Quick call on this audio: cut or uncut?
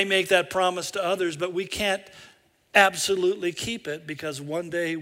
uncut